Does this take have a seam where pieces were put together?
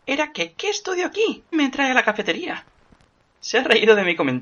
yes; 1 cut; at 1.5 s

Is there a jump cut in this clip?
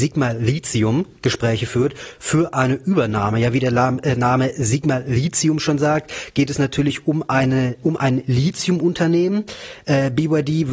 no; 0 cuts

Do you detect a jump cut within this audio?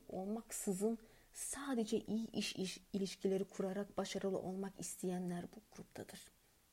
no; 0 cuts

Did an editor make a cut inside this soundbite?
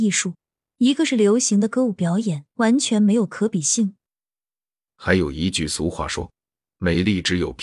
yes; 1 cut; at 2.5 s

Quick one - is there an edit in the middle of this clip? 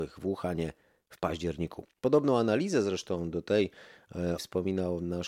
yes; 1 cut; at 4.4 s

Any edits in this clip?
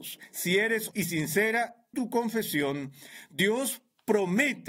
yes; 2 cuts; at 0.9 s, 1.9 s

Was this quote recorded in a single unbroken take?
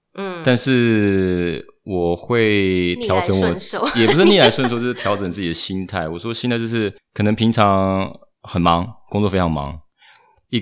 no; 1 cut; at 7.0 s

